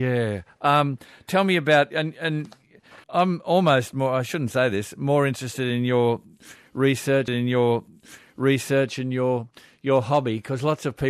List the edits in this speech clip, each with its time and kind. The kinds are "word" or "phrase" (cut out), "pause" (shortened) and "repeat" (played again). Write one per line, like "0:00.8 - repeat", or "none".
0:03.0 - pause
0:07.3 - repeat

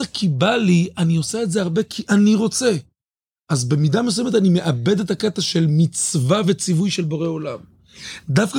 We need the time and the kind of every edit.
none

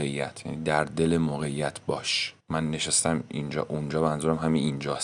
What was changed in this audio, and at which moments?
0:02.4 - pause

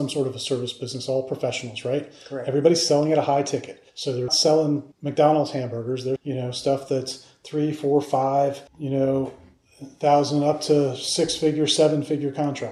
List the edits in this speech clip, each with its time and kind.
0:03.9 - pause
0:04.3 - word
0:04.9 - pause
0:06.2 - word
0:08.7 - pause

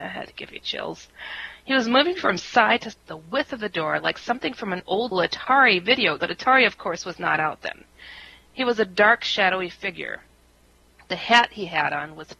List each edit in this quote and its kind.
0:02.9 - word
0:05.1 - word
0:06.2 - word

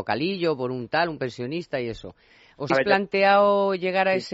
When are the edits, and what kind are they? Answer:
0:02.7 - word

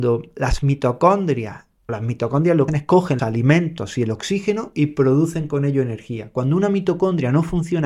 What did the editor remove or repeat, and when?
0:01.9 - word
0:02.7 - word
0:03.2 - word

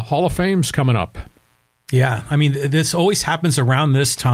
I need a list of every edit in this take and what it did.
none

